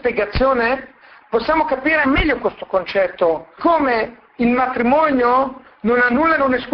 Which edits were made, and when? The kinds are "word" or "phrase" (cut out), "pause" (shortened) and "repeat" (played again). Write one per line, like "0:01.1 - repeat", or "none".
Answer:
0:02.0 - word
0:03.6 - word